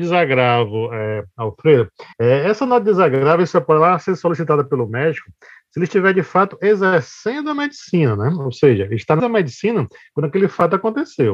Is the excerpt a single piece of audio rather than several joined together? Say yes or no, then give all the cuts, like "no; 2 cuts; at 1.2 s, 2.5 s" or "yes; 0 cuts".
no; 2 cuts; at 2.1 s, 9.2 s